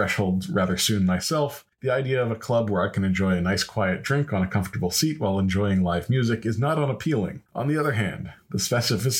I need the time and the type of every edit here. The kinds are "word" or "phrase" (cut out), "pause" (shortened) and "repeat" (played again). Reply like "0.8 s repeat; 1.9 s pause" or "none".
1.7 s pause; 7.5 s pause

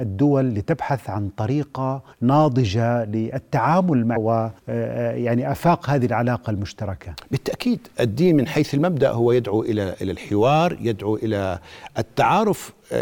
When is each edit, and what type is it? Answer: 2.1 s pause; 4.2 s phrase; 4.6 s pause

